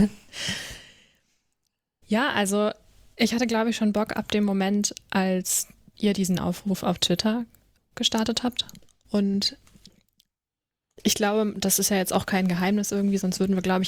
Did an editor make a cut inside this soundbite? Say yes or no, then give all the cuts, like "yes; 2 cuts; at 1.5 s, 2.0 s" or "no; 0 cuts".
no; 0 cuts